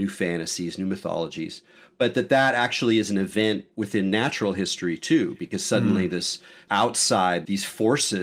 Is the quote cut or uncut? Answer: uncut